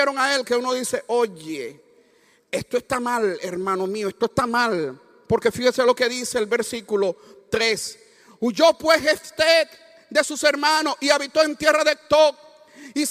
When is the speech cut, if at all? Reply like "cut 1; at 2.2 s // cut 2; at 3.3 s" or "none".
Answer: none